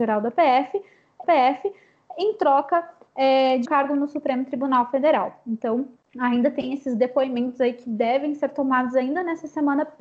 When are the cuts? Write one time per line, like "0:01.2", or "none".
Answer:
0:01.2
0:03.6
0:06.0